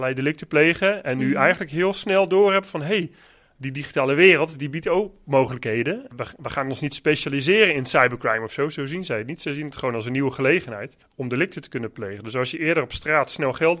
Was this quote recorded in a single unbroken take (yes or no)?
yes